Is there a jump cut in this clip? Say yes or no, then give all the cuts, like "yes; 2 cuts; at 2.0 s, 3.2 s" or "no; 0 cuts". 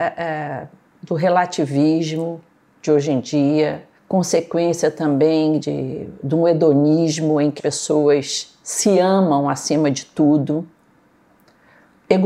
yes; 3 cuts; at 4.0 s, 5.6 s, 7.6 s